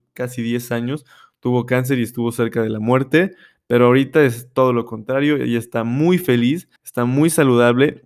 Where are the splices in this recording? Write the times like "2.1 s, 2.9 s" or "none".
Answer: 6.8 s